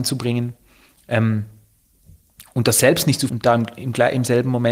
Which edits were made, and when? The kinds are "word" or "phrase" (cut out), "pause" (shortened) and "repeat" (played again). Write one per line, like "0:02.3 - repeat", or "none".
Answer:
0:03.3 - word